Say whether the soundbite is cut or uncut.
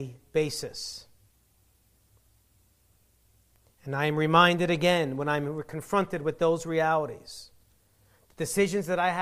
uncut